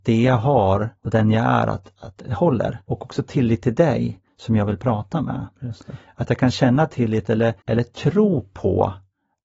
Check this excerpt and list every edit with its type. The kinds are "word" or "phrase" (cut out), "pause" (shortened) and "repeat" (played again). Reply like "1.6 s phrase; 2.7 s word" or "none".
1.0 s pause; 2.8 s pause; 7.6 s pause